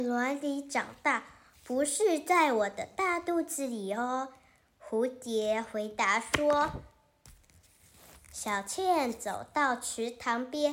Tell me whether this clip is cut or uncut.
uncut